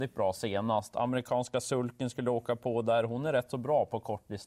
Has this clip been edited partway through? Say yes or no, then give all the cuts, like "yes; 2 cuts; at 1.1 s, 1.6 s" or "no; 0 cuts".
no; 0 cuts